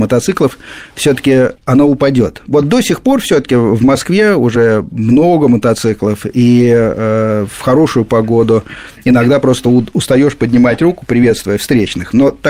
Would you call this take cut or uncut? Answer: cut